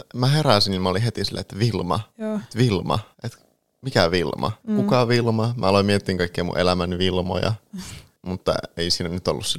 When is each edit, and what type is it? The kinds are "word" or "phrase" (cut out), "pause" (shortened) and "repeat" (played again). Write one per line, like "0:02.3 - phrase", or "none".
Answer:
0:02.1 - pause
0:03.1 - pause
0:04.6 - pause